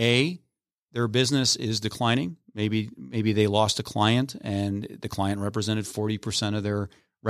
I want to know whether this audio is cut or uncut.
uncut